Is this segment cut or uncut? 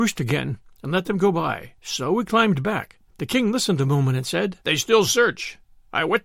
cut